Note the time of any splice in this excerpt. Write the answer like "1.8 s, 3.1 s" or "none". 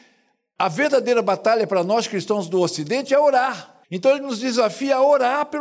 3.8 s